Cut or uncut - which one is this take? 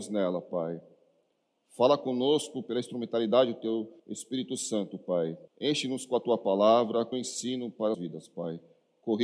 cut